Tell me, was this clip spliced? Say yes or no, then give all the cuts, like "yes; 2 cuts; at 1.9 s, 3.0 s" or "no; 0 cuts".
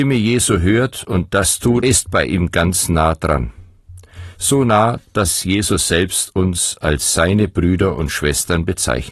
yes; 1 cut; at 1.8 s